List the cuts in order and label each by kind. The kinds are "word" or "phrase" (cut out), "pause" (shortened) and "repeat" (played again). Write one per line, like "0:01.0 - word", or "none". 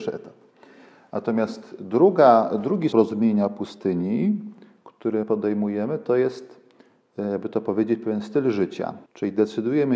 0:02.9 - word
0:05.2 - word
0:09.1 - pause